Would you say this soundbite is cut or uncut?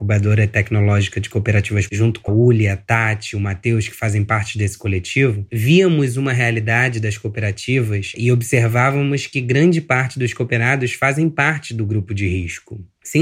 cut